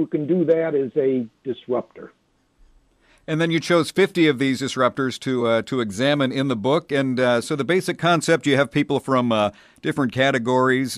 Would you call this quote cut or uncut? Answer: uncut